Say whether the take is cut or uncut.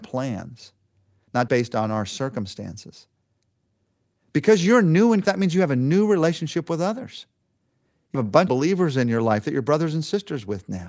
cut